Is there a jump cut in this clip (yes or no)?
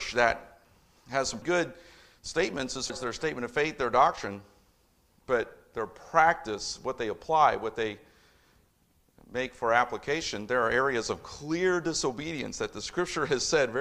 yes